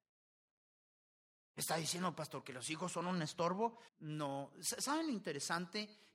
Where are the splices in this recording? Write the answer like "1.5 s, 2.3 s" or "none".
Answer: 3.9 s

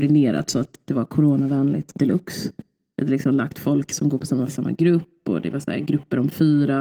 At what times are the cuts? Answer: 4.5 s

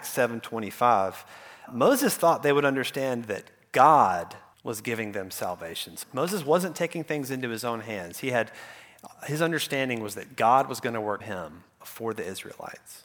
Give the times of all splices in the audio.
1.7 s, 4.5 s, 6.0 s, 11.2 s, 11.8 s

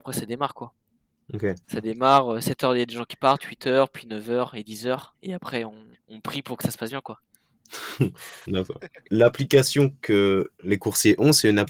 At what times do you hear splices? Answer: 1.6 s, 5.1 s, 5.9 s, 9.0 s

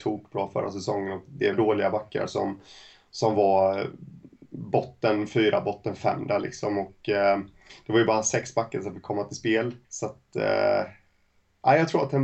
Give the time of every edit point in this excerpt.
1.5 s, 9.8 s

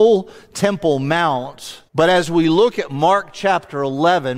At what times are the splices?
1.9 s

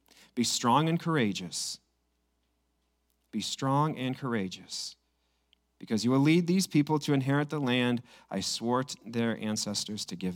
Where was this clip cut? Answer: none

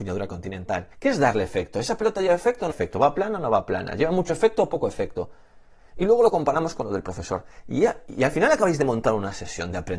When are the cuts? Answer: 0.9 s, 2.7 s

